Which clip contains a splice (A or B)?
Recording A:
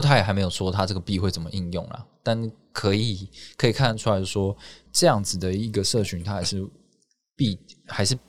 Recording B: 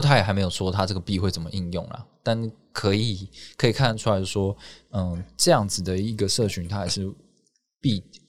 A